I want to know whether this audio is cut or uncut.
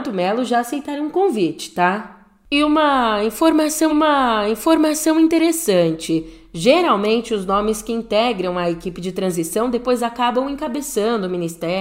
cut